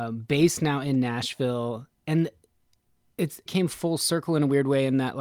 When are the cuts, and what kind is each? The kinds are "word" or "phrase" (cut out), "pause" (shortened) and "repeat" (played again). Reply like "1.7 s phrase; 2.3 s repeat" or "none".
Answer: 3.5 s phrase